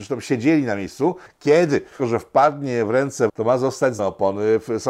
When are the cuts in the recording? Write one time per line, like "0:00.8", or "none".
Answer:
0:02.0
0:03.3
0:04.0